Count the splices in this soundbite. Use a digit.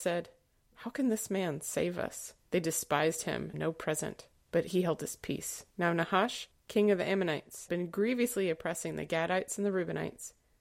4